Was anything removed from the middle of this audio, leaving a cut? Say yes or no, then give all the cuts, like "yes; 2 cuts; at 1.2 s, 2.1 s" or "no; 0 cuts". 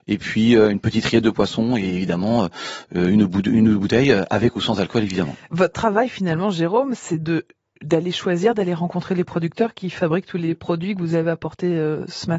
no; 0 cuts